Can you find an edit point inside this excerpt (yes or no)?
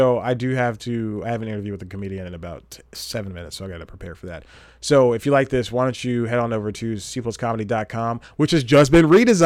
no